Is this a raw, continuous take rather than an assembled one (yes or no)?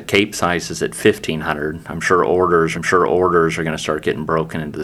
no